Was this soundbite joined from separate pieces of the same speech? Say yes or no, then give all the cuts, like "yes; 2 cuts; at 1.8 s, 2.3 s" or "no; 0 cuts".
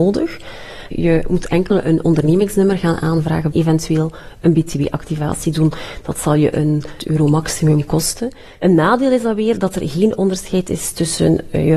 yes; 2 cuts; at 3.5 s, 7.0 s